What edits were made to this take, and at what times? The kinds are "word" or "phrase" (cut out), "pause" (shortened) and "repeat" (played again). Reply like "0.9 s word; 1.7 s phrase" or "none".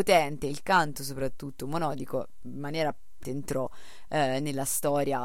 3.2 s word